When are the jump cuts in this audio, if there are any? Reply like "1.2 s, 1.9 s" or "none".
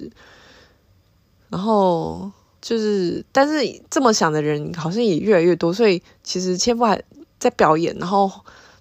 2.5 s